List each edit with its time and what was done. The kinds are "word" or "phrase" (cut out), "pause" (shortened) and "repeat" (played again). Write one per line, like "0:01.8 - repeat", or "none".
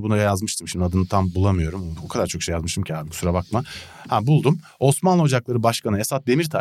none